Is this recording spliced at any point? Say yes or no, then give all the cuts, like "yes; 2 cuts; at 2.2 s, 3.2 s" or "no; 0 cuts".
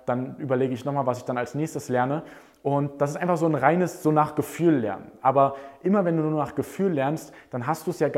no; 0 cuts